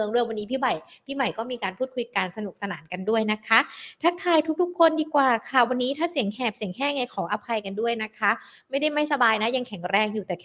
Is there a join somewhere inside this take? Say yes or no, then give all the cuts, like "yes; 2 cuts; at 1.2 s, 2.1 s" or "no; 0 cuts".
no; 0 cuts